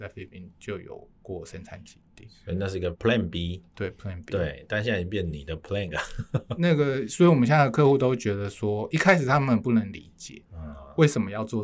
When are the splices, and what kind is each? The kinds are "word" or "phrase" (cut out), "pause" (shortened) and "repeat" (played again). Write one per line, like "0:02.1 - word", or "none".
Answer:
0:02.9 - word
0:05.9 - word